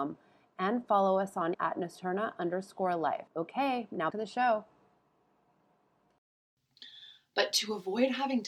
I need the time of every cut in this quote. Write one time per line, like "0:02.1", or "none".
0:01.5
0:03.3
0:04.1